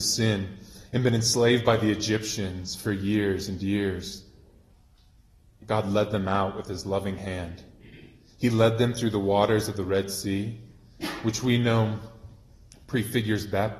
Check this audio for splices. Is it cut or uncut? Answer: uncut